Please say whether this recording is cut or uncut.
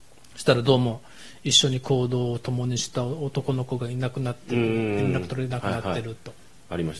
uncut